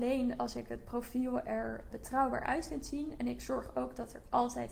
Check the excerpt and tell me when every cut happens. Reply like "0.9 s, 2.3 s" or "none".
1.9 s